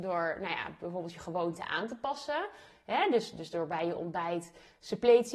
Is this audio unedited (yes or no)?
yes